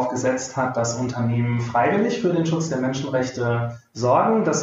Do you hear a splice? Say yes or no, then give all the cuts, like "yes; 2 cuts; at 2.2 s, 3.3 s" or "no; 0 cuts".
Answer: no; 0 cuts